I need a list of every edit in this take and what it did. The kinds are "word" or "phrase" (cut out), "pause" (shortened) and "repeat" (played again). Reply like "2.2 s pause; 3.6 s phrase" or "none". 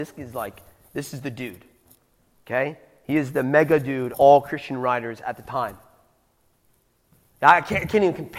4.1 s word